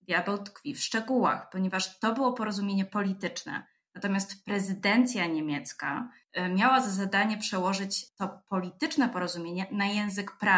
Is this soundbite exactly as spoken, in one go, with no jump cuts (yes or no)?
no